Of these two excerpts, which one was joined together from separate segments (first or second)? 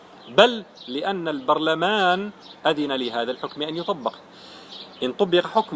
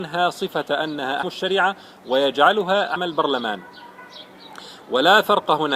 second